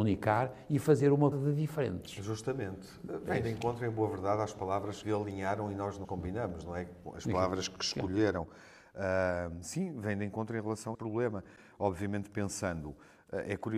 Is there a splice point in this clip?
yes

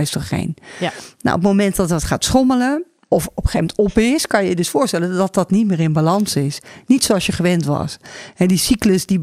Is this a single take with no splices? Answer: yes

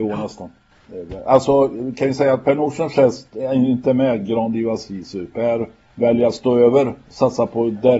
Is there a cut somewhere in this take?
no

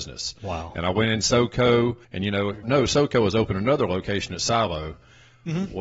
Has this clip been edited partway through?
yes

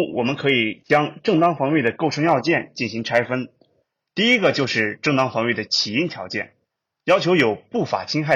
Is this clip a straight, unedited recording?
yes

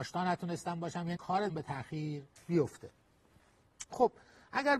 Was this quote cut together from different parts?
yes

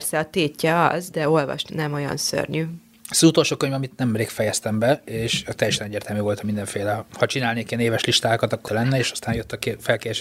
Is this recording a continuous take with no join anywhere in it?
no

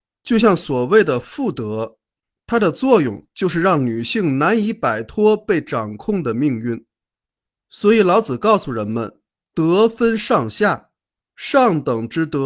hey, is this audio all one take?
yes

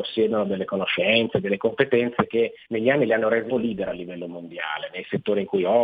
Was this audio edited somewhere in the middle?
yes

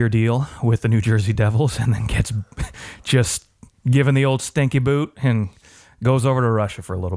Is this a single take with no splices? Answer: yes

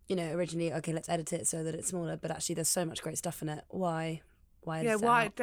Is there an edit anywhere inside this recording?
no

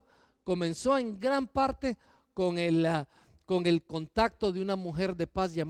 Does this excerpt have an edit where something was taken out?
no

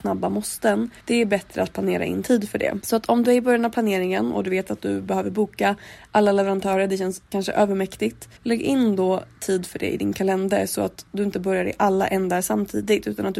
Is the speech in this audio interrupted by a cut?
yes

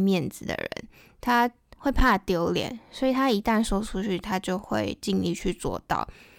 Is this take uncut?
yes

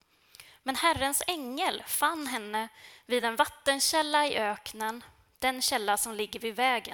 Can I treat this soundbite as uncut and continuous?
yes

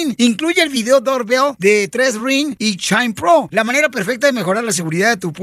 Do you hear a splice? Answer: no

